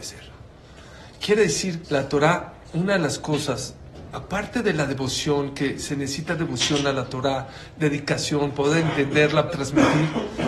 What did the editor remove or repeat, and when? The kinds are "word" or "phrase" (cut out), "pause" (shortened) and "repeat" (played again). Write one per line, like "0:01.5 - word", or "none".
0:01.8 - word
0:09.5 - phrase

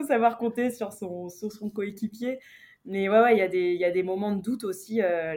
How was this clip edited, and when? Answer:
none

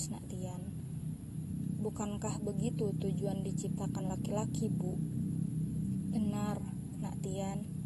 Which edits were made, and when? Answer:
none

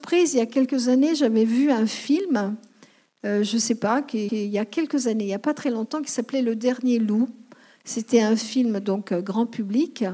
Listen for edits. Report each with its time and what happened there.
0:04.3 - repeat

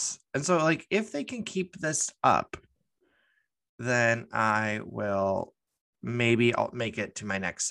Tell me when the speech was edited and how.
none

